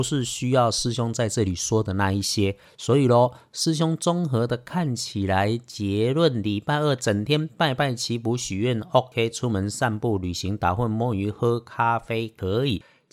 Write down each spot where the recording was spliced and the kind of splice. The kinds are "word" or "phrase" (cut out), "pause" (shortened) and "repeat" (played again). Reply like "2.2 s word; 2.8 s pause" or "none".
none